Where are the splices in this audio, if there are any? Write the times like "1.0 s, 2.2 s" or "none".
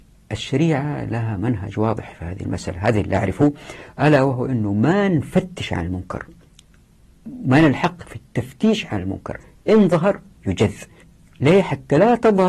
none